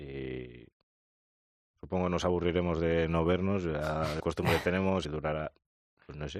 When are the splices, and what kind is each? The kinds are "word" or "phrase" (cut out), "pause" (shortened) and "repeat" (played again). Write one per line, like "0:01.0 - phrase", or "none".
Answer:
0:04.2 - word
0:05.0 - word

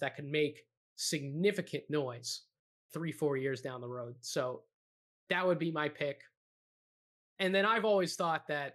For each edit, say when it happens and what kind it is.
0:02.9 - word

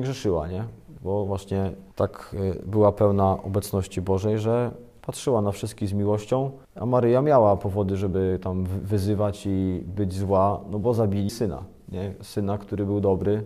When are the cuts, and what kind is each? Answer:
0:01.9 - pause
0:06.6 - pause
0:11.3 - word

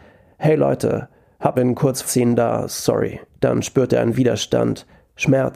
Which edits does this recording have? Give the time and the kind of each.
0:01.5 - word
0:02.0 - word
0:03.3 - pause

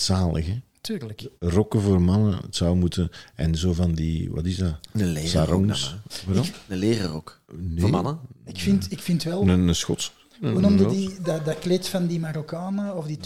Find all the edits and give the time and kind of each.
0:01.4 - pause
0:07.4 - pause
0:08.3 - pause

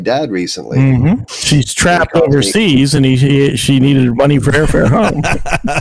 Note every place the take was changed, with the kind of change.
none

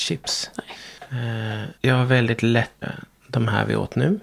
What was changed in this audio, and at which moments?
0:01.8 - pause
0:02.8 - word

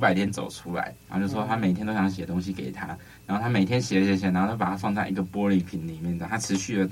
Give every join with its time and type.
0:01.0 - pause

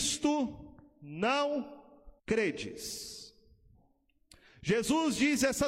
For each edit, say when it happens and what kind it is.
0:02.2 - pause

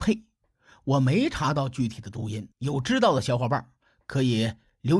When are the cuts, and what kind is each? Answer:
0:02.5 - pause

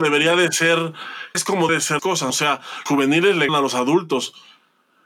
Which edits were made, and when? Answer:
0:01.3 - word
0:01.7 - word
0:02.0 - word
0:02.3 - word
0:02.9 - word
0:03.5 - word

